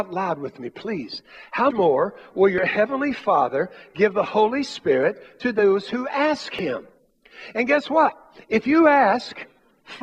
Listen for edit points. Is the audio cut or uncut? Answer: cut